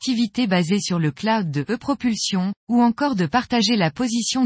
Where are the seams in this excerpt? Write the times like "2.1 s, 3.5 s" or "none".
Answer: 2.6 s